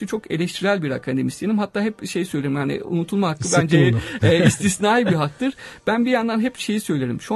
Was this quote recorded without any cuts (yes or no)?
yes